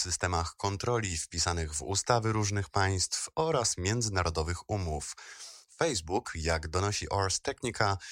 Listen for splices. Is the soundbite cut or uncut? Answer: uncut